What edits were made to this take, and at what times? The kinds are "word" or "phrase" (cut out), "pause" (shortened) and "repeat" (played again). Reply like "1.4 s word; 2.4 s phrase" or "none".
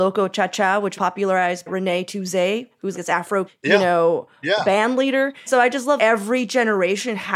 1.0 s word; 1.7 s word; 2.9 s word; 3.5 s word; 5.5 s word; 6.0 s word